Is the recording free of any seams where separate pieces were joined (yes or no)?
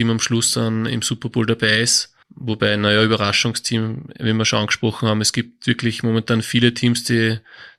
no